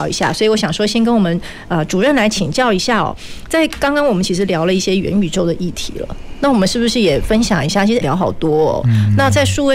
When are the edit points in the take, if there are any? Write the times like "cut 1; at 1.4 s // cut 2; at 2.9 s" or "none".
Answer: cut 1; at 8.0 s